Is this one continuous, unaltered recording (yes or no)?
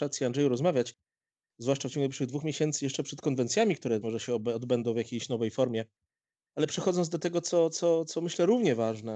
no